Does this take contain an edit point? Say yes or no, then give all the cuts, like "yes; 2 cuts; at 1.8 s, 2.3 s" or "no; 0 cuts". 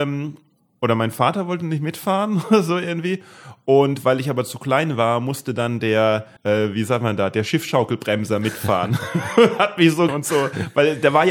yes; 2 cuts; at 6.4 s, 10.1 s